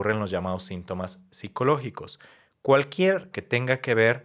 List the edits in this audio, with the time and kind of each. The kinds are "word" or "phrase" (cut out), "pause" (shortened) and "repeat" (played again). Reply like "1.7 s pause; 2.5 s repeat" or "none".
3.3 s word